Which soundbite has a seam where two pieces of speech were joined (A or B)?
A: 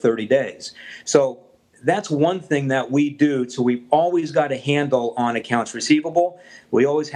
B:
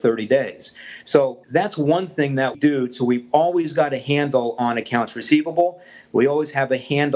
B